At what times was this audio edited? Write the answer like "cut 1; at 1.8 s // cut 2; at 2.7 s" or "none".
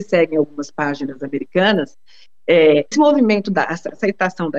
cut 1; at 2.9 s